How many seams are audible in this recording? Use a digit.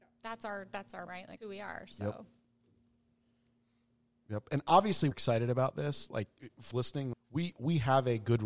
5